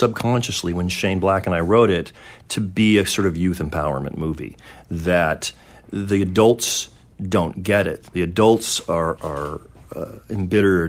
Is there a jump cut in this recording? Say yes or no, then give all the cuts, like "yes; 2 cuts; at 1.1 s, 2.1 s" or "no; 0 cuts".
yes; 1 cut; at 9.2 s